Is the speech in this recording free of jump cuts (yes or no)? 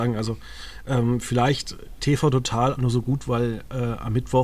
no